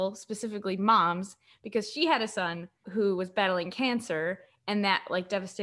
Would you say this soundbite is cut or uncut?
uncut